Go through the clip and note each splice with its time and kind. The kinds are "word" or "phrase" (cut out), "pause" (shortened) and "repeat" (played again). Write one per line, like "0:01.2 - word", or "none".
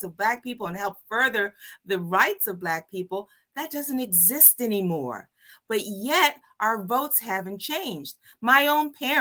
none

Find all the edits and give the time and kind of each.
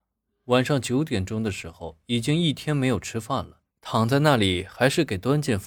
0:03.7 - pause

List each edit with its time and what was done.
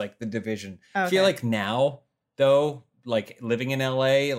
none

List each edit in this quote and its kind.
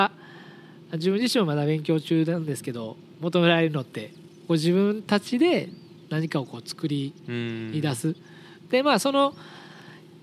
none

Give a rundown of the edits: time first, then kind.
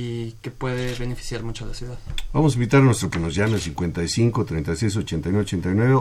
0:03.1 - word

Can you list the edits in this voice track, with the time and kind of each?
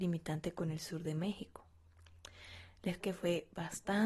0:03.0 - word

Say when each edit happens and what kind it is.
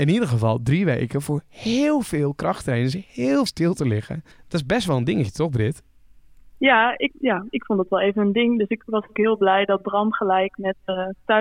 0:03.5 - phrase
0:04.3 - pause
0:07.1 - word

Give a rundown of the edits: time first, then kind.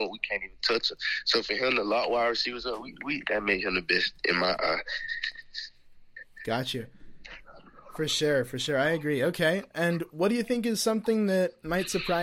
none

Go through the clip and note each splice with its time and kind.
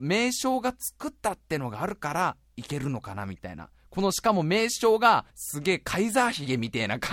0:05.3 - pause

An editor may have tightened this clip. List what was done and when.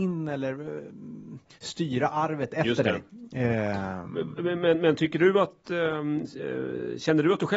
none

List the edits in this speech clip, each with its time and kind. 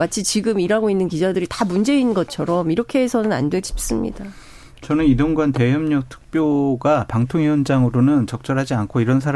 0:03.7 - word

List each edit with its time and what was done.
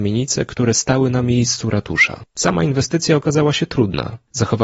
none

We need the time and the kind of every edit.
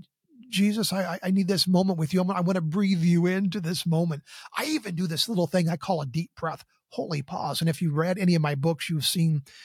none

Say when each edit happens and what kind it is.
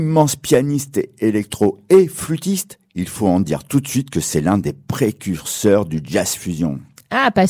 none

